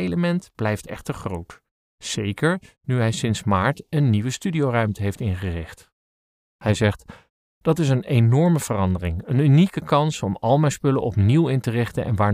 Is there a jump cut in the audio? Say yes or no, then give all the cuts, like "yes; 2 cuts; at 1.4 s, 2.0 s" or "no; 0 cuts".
no; 0 cuts